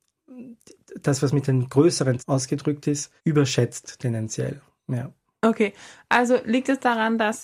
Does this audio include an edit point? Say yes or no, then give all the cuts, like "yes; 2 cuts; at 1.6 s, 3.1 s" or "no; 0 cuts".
yes; 2 cuts; at 2.2 s, 3.2 s